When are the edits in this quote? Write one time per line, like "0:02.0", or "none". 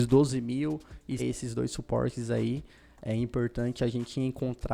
0:01.2